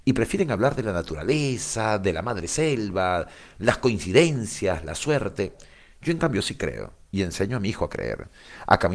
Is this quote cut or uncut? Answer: uncut